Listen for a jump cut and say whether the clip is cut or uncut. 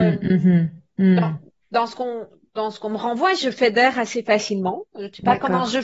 uncut